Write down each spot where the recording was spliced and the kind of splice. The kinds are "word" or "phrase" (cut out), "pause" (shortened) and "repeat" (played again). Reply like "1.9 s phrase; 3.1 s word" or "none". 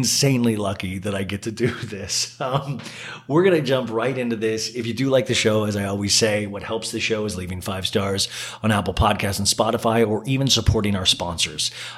none